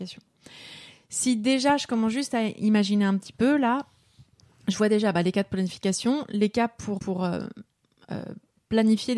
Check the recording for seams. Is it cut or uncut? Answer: cut